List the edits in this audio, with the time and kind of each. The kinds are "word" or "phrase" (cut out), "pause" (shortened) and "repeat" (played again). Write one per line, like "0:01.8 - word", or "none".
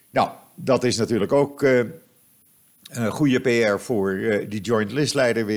none